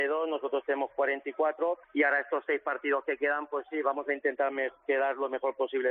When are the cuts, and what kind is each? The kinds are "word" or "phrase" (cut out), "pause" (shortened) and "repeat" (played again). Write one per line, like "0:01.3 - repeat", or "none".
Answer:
0:01.8 - pause